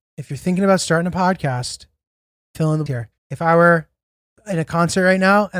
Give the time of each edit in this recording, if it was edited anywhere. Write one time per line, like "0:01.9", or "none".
0:02.9
0:03.2

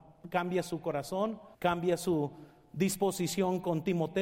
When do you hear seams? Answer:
0:01.5

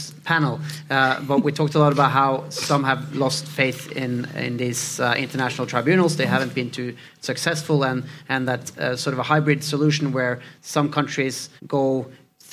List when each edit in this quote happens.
0:11.6

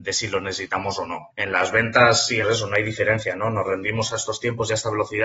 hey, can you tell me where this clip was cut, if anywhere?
0:01.3
0:02.4

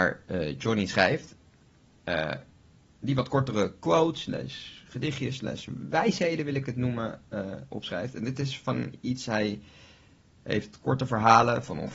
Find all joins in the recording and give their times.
none

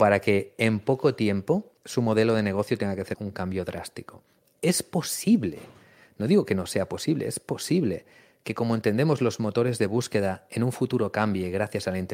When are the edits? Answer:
0:01.8
0:03.1

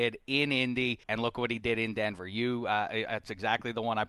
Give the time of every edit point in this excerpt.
0:01.0

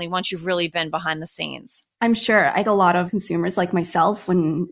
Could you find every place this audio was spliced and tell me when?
0:01.9
0:02.6

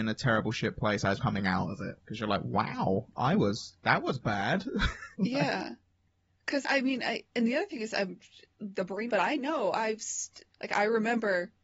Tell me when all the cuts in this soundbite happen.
0:01.2
0:02.0
0:03.8
0:05.1
0:06.6
0:08.7
0:09.1
0:10.5

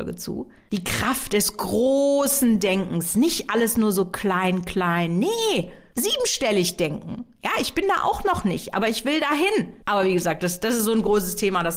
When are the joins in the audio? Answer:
0:09.8

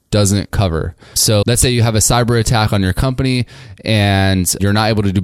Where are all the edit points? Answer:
0:01.4

